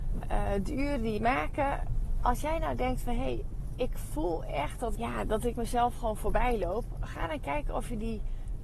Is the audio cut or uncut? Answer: cut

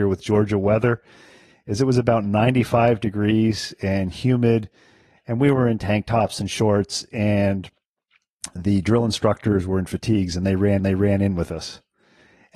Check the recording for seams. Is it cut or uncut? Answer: cut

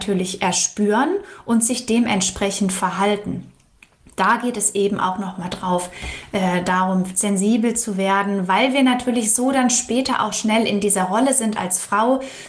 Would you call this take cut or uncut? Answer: uncut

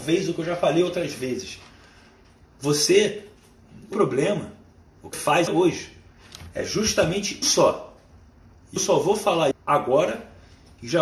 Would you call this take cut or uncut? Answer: cut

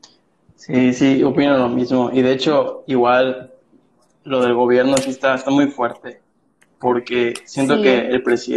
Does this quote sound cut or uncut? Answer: uncut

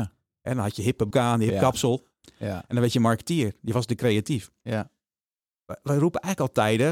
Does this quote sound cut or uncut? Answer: cut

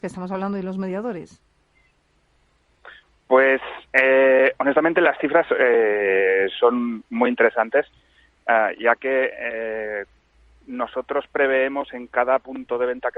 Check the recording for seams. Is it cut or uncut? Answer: uncut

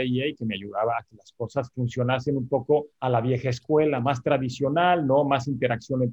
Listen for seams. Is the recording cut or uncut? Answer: cut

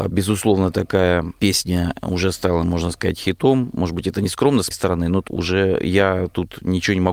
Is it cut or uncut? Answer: cut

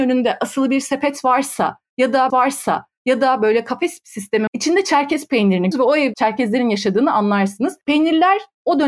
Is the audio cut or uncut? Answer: cut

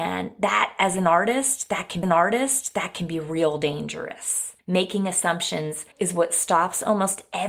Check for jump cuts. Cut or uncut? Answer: cut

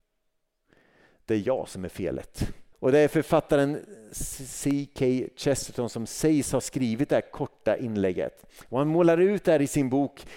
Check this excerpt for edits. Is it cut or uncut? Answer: cut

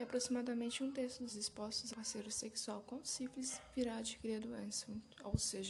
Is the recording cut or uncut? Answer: cut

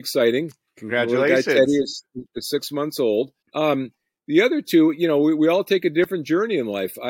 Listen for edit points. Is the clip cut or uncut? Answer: cut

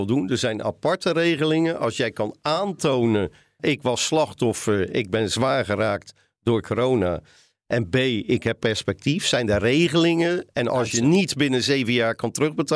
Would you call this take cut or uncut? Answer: cut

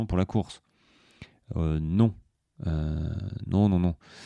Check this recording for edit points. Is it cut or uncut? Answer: uncut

